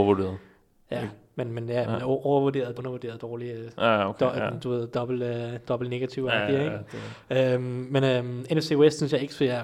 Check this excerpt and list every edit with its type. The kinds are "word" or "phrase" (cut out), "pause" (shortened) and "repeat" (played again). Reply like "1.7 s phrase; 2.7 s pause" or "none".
2.8 s word